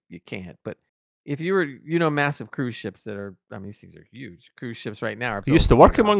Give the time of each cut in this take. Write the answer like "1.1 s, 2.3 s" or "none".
none